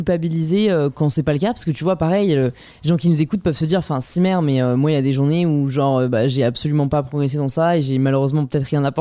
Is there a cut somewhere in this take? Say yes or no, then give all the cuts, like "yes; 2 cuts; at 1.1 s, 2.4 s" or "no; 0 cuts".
no; 0 cuts